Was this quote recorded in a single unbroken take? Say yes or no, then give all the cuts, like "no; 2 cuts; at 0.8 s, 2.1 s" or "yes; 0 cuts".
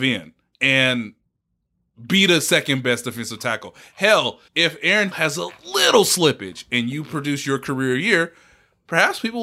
no; 2 cuts; at 4.5 s, 5.1 s